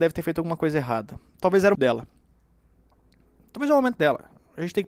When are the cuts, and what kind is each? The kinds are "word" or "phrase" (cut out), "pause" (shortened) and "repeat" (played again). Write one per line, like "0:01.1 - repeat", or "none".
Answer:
0:01.7 - phrase